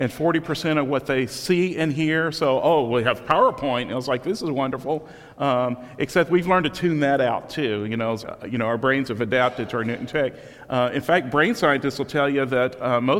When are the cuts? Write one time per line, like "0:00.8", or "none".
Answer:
0:08.2